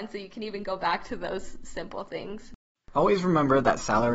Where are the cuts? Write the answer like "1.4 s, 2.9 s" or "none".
2.7 s

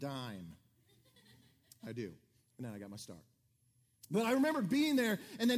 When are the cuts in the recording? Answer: none

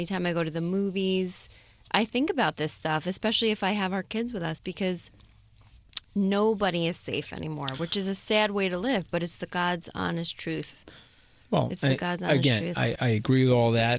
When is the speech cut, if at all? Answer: 13.0 s

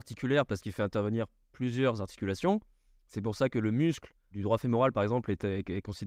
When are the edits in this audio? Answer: none

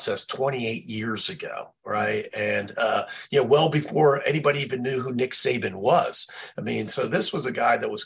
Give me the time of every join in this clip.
none

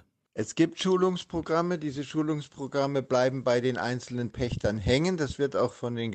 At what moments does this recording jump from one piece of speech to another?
4.3 s

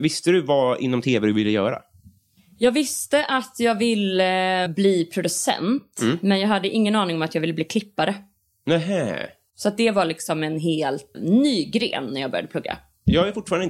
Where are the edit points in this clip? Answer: 4.7 s, 11.1 s

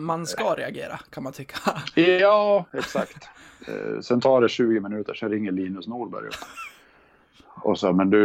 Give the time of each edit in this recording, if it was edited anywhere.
none

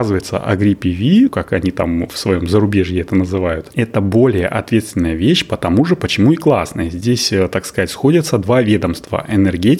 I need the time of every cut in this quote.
1.3 s

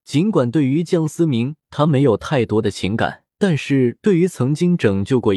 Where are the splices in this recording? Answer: 3.3 s

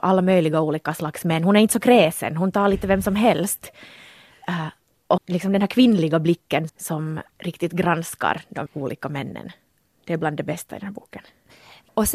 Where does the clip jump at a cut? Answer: 5.2 s, 6.7 s, 8.7 s

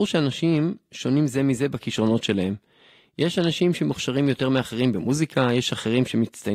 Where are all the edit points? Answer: none

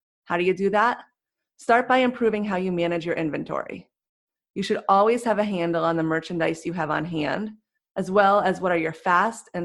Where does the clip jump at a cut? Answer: none

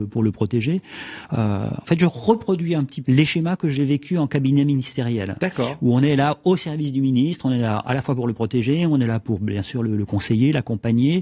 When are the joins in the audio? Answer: 3.0 s

